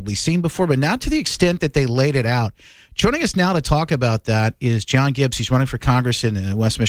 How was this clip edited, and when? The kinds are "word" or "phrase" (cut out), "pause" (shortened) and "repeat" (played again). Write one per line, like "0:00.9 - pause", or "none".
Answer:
none